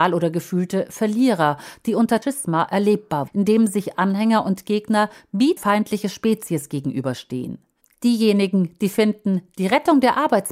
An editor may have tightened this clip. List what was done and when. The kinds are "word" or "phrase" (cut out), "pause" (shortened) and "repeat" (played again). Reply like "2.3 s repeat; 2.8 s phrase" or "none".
2.2 s phrase; 3.3 s word; 5.6 s word